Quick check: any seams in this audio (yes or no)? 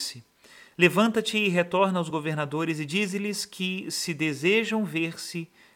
no